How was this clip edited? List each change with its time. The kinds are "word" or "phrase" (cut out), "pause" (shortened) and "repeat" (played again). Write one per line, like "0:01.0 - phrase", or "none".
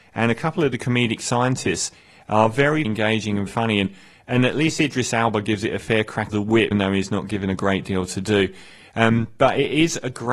0:02.8 - word
0:03.5 - word
0:06.3 - word
0:06.7 - word